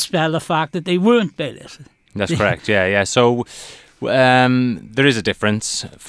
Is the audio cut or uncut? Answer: uncut